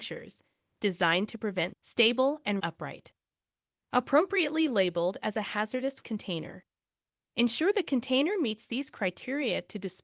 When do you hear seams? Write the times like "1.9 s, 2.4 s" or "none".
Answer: 1.7 s, 2.6 s, 6.0 s